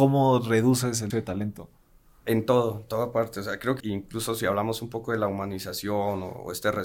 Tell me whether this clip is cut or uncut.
cut